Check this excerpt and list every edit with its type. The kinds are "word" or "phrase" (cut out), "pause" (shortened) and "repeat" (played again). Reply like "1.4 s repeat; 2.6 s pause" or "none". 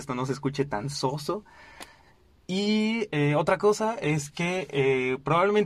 none